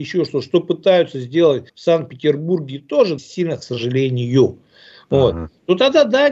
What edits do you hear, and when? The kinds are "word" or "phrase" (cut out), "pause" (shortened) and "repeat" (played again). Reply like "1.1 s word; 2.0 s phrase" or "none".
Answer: 1.7 s pause; 3.2 s word; 3.6 s phrase